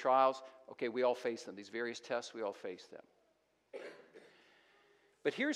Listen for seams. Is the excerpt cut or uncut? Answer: uncut